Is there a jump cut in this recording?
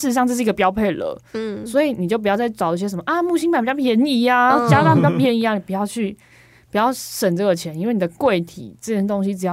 no; 0 cuts

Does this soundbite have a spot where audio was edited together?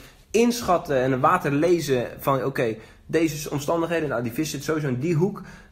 no; 0 cuts

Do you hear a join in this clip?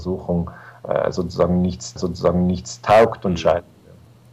yes; 1 cut; at 2.0 s

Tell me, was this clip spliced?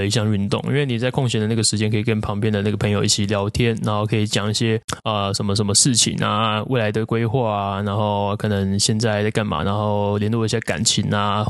yes; 1 cut; at 9.6 s

